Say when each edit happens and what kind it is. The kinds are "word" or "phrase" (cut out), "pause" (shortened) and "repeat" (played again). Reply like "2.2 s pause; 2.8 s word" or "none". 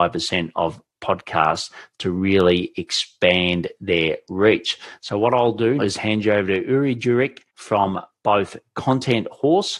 5.8 s word; 7.5 s pause